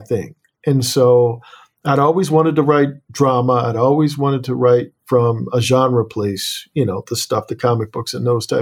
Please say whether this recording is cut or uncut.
uncut